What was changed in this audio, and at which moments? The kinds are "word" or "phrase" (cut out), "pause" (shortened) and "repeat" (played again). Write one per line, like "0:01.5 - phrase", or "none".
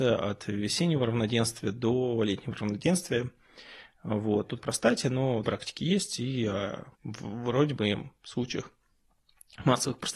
0:04.6 - phrase
0:05.4 - word
0:06.9 - pause

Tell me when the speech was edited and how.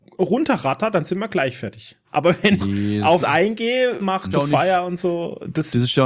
0:02.0 - pause
0:02.6 - phrase
0:03.2 - word
0:04.0 - phrase
0:04.3 - phrase

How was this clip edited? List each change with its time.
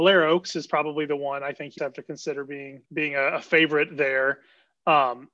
0:01.8 - word
0:02.9 - pause

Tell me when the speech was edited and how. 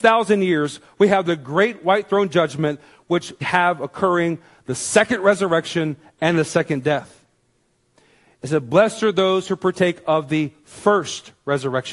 0:03.4 - word

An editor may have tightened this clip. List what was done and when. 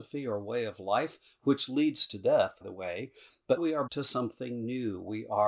0:02.6 - word
0:03.6 - word
0:03.9 - word

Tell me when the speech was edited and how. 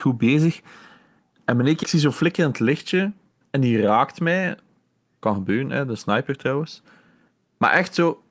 0:01.8 - word
0:03.4 - pause

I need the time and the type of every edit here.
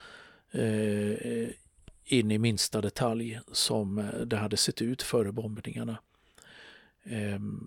none

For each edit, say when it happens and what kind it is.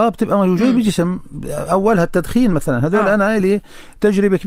none

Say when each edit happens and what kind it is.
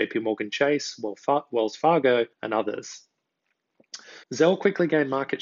0:02.3 - pause
0:04.2 - pause

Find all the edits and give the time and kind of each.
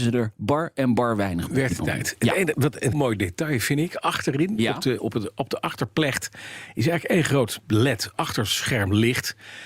0:01.5 - word
0:02.9 - word

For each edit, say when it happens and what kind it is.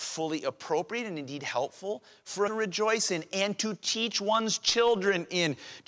0:02.5 - phrase

